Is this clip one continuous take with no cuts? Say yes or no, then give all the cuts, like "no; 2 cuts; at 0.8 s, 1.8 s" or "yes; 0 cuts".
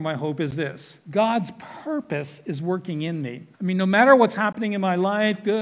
no; 2 cuts; at 1.0 s, 3.5 s